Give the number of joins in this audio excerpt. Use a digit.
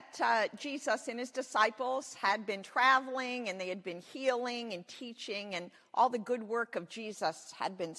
0